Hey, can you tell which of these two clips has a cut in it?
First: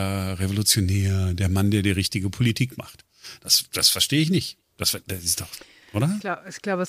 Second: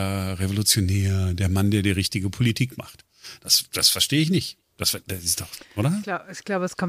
second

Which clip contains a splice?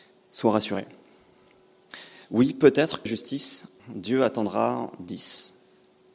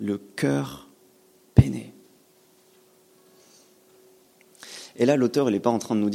first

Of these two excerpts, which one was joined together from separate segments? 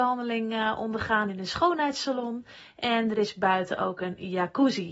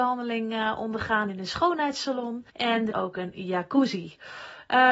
second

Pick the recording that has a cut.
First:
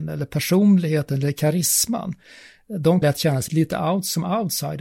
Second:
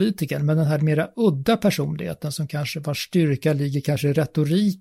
first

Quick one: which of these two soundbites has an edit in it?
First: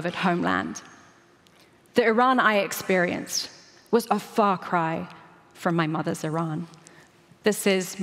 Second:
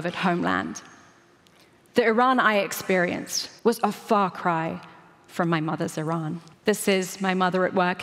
second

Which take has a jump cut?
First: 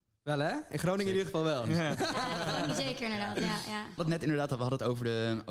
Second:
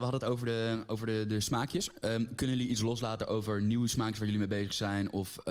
first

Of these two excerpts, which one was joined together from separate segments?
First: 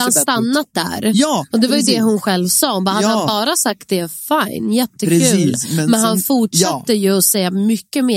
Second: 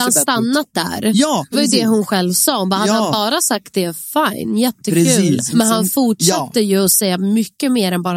second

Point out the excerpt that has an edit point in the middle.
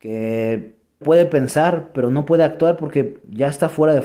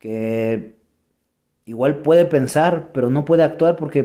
first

